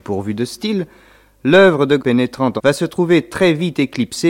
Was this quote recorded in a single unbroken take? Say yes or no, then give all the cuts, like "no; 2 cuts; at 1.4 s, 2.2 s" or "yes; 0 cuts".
no; 2 cuts; at 2.0 s, 2.6 s